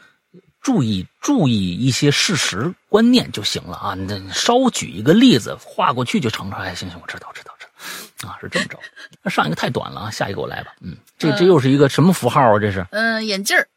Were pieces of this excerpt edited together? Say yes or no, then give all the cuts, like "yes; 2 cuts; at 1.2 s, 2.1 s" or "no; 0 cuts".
yes; 1 cut; at 9.1 s